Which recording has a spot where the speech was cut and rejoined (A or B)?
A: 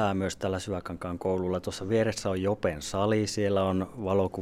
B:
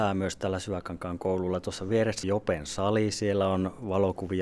B